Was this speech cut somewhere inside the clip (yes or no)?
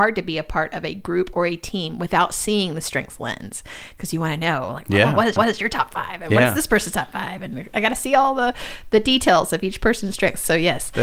yes